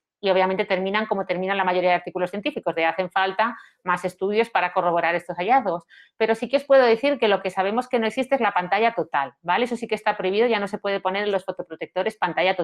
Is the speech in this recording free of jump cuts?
yes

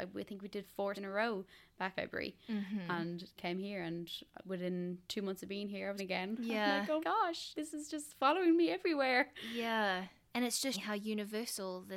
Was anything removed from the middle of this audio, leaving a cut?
yes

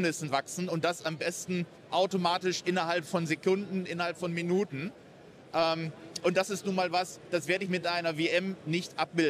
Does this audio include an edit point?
no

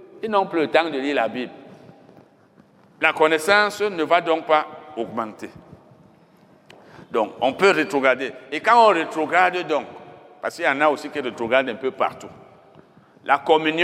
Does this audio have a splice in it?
no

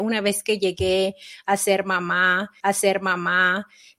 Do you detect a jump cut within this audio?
yes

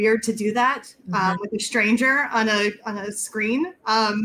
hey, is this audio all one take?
yes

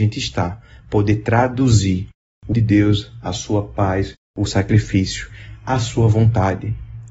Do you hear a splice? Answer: yes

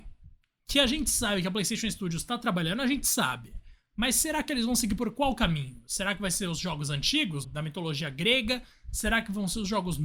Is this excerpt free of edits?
no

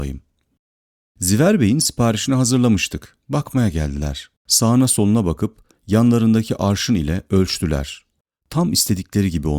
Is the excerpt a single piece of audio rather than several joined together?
no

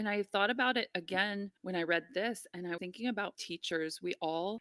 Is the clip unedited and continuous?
no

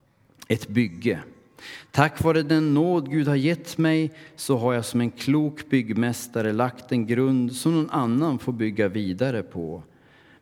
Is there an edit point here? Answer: no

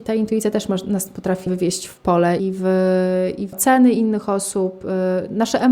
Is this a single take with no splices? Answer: no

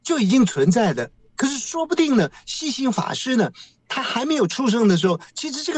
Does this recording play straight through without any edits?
yes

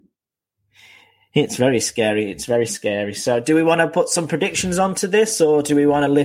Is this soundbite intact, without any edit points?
yes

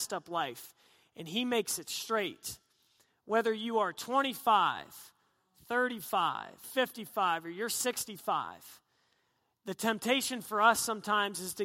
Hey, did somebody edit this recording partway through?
yes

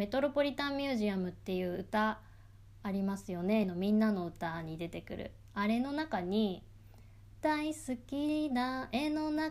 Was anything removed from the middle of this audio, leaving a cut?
yes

